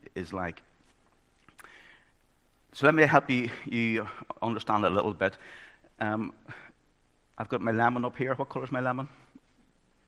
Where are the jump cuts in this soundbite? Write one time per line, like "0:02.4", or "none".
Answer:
none